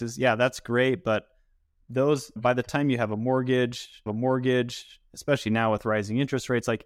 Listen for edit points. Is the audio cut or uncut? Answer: cut